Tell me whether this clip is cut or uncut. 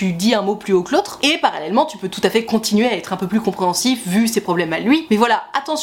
uncut